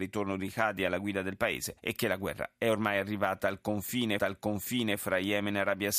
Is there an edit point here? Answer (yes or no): yes